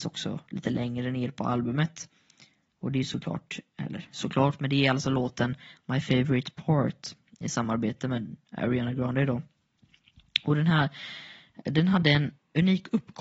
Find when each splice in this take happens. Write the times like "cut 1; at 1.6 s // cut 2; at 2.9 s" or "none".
none